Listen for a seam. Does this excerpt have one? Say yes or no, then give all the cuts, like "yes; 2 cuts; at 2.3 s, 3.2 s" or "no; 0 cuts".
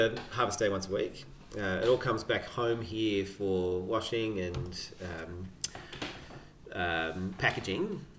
no; 0 cuts